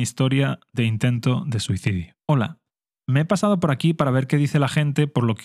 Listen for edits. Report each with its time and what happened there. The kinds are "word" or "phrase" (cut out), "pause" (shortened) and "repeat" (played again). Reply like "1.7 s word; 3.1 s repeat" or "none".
2.2 s pause